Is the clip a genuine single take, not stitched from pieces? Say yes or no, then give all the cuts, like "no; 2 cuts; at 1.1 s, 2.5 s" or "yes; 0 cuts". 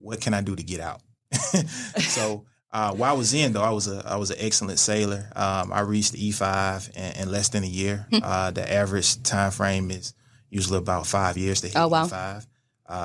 yes; 0 cuts